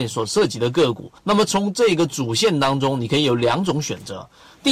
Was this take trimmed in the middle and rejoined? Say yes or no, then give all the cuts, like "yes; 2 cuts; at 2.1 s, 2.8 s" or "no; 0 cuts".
yes; 1 cut; at 1.2 s